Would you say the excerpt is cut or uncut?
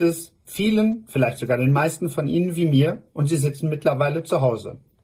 uncut